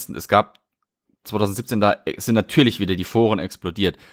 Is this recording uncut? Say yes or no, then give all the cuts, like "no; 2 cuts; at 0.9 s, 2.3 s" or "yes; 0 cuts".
yes; 0 cuts